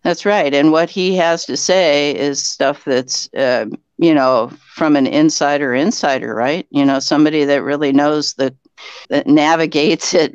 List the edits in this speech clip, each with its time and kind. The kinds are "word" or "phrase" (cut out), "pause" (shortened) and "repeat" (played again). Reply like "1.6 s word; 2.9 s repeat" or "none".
9.0 s pause